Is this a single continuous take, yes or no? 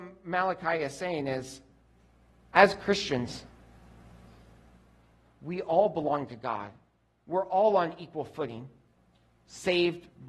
yes